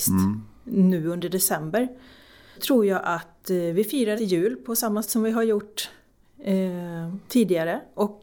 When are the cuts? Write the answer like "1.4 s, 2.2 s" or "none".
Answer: 2.6 s, 4.2 s, 5.0 s